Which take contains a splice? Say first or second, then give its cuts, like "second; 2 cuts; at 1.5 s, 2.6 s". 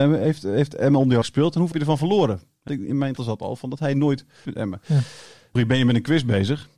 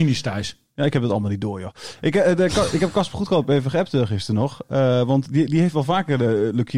first; 6 cuts; at 1.2 s, 1.7 s, 2.7 s, 3.2 s, 4.5 s, 5.6 s